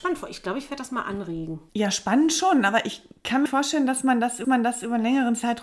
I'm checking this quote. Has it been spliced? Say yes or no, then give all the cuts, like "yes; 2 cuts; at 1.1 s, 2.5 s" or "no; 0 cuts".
yes; 3 cuts; at 1.7 s, 3.5 s, 4.4 s